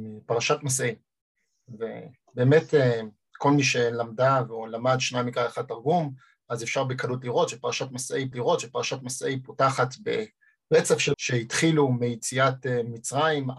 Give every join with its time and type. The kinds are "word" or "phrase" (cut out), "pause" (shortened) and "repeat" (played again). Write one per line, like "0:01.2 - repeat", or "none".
0:08.3 - repeat
0:11.1 - word